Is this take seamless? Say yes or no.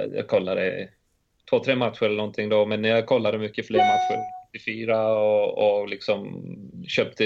yes